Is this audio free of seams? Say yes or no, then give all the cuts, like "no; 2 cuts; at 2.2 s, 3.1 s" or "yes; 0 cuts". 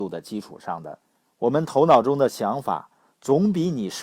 no; 1 cut; at 1.1 s